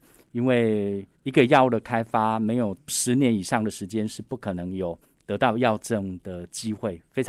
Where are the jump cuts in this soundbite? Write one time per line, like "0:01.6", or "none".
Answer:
0:01.2
0:05.0